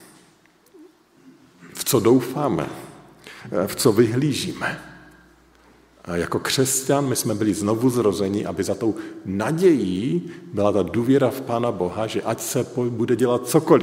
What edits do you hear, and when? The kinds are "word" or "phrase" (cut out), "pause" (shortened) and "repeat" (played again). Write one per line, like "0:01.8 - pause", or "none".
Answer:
none